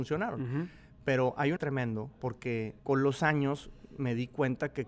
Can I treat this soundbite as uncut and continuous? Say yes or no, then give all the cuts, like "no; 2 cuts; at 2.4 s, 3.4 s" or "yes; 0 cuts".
no; 2 cuts; at 1.6 s, 2.8 s